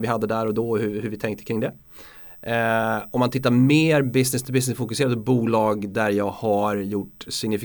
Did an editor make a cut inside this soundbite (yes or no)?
no